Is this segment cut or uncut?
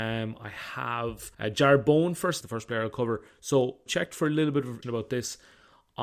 cut